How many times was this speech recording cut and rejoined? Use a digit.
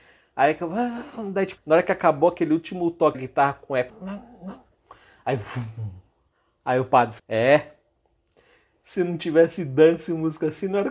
4